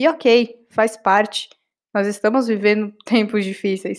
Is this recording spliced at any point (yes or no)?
no